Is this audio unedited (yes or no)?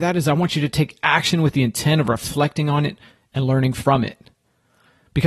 yes